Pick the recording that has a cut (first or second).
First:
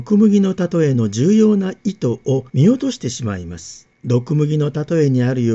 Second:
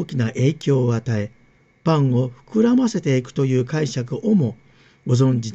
first